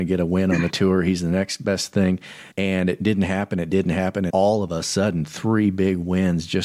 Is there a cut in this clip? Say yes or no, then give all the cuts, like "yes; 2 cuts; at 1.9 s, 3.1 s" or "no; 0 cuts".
yes; 2 cuts; at 2.5 s, 4.3 s